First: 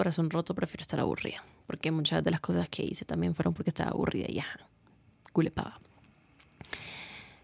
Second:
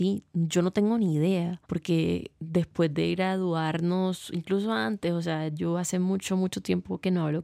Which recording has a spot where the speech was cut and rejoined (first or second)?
second